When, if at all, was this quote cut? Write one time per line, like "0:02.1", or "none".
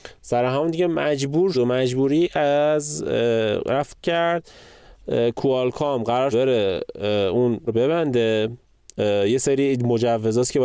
0:01.5
0:04.0
0:06.3
0:07.7

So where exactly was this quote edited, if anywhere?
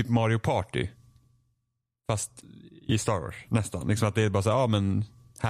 none

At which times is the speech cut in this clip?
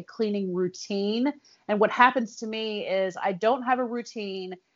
none

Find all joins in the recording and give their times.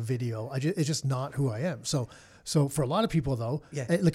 none

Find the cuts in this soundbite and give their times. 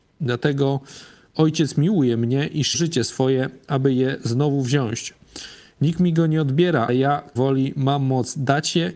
0:02.7
0:06.9
0:07.4

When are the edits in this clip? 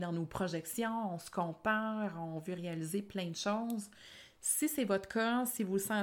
none

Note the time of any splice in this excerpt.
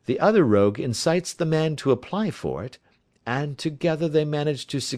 none

